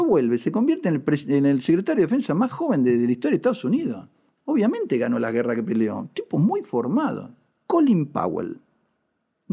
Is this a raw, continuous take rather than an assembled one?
yes; 0 cuts

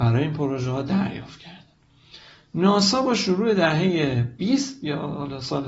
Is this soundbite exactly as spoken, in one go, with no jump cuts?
yes; 0 cuts

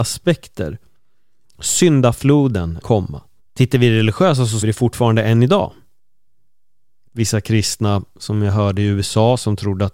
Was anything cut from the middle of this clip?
yes; 4 cuts; at 2.8 s, 3.4 s, 4.6 s, 7.1 s

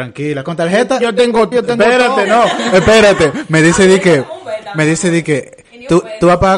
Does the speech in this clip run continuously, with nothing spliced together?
no; 1 cut; at 1.5 s

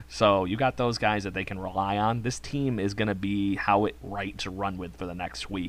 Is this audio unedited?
no; 2 cuts; at 4.0 s, 4.3 s

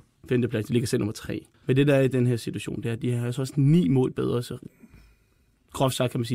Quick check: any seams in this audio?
yes; 1 cut; at 1.5 s

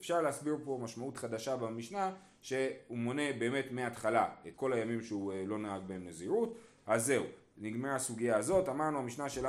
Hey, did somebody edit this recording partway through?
yes; 1 cut; at 4.5 s

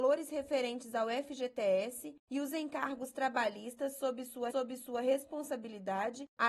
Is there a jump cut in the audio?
yes; 1 cut; at 4.5 s

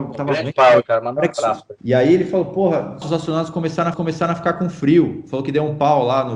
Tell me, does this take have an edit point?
yes; 3 cuts; at 1.8 s, 3.0 s, 3.9 s

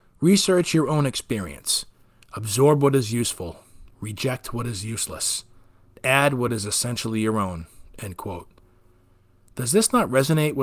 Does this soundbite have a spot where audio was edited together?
no; 0 cuts

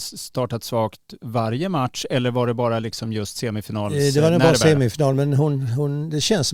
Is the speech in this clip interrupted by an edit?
no; 0 cuts

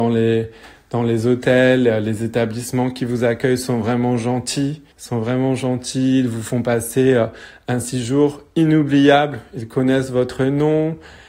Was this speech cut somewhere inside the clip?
yes; 1 cut; at 4.9 s

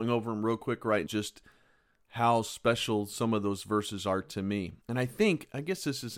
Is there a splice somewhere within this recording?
yes; 2 cuts; at 1.1 s, 4.8 s

